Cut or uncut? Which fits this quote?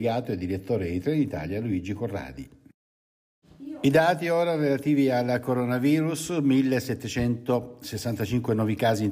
uncut